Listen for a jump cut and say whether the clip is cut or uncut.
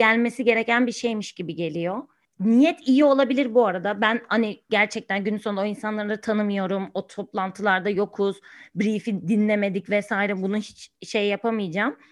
uncut